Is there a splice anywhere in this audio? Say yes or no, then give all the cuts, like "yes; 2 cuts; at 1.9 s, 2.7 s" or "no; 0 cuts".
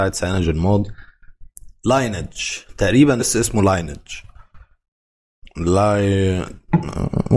yes; 1 cut; at 3.2 s